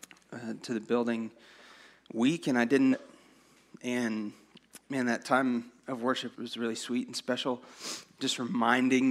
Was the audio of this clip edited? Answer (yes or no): yes